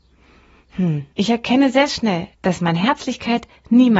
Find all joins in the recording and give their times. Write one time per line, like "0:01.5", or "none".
0:01.1
0:02.3